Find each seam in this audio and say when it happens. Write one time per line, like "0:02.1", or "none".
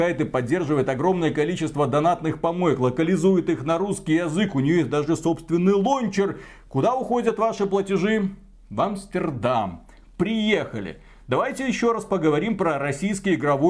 none